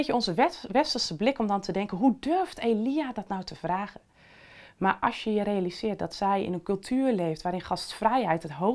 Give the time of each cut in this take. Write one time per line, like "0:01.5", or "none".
none